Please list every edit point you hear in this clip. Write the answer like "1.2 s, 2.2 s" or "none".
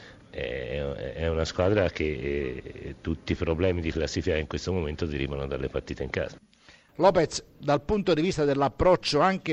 none